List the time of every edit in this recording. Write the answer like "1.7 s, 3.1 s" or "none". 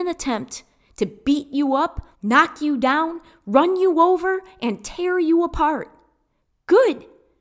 2.1 s

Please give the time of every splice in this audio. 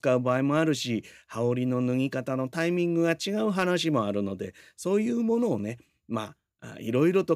none

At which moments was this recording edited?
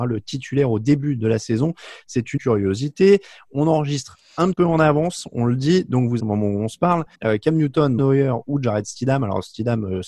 2.4 s, 4.5 s, 6.2 s, 7.1 s, 8.0 s

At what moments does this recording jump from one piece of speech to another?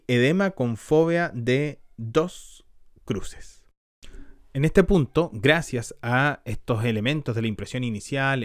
none

